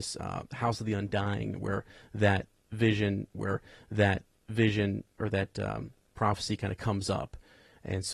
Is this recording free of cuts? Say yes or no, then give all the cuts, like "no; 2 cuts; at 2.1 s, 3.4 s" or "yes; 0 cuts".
no; 1 cut; at 3.3 s